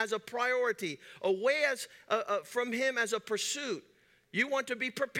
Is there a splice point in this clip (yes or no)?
no